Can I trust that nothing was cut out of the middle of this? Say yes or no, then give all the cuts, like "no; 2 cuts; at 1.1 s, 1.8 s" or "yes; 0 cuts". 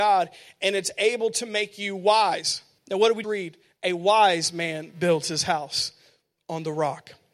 no; 2 cuts; at 2.8 s, 3.2 s